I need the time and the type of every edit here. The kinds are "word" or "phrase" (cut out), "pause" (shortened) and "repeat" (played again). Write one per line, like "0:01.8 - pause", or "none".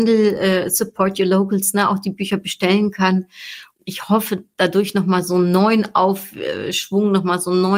0:03.7 - phrase